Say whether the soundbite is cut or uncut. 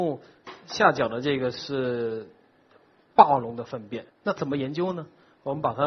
cut